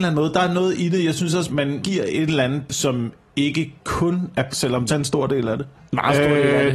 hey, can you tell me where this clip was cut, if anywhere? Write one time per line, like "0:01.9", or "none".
0:01.5
0:01.8
0:02.7
0:03.8
0:04.5
0:04.9
0:05.8